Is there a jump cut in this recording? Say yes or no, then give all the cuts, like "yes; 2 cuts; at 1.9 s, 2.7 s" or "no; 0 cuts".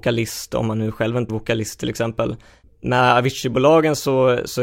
yes; 1 cut; at 1.3 s